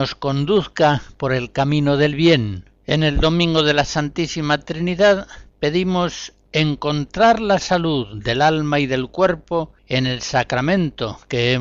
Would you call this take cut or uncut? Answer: cut